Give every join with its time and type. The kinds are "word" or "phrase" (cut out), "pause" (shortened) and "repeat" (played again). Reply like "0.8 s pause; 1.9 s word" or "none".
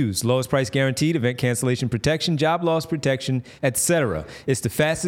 3.6 s pause